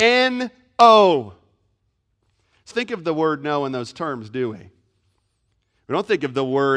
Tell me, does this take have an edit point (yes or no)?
yes